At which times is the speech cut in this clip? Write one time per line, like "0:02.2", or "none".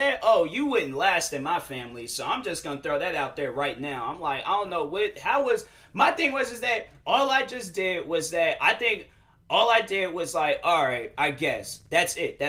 none